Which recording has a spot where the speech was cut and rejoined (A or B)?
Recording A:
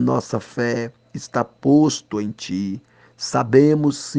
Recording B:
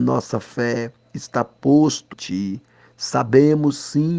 B